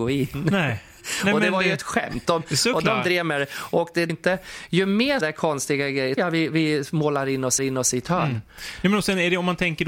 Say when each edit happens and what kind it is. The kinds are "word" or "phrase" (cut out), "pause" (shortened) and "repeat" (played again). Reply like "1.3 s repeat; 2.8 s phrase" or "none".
4.1 s phrase; 5.2 s word; 6.2 s word; 7.6 s repeat